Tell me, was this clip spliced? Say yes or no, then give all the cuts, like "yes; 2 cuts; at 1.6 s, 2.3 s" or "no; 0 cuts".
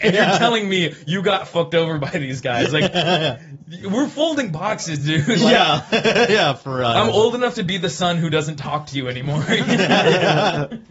no; 0 cuts